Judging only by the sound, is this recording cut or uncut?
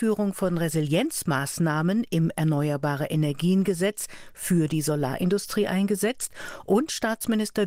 uncut